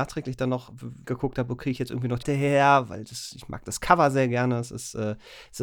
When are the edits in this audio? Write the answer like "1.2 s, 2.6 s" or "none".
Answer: 1.0 s, 1.6 s, 2.2 s